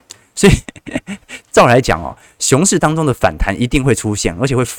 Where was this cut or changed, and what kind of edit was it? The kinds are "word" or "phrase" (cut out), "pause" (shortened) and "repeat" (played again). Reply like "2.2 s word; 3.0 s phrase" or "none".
none